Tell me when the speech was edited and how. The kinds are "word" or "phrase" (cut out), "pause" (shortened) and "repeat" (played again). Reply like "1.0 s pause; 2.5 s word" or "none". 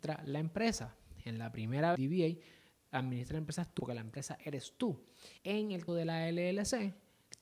1.9 s phrase; 3.8 s word; 5.4 s pause; 5.9 s word